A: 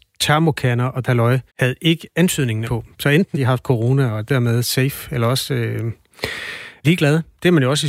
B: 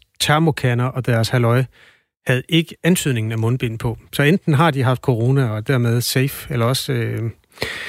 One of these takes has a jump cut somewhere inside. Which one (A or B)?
A